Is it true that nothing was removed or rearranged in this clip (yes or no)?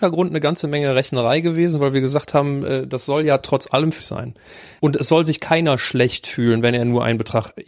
no